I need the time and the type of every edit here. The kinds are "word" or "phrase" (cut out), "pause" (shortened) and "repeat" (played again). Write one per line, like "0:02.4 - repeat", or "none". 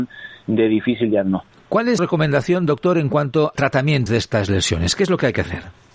0:02.0 - word
0:03.6 - word
0:04.1 - word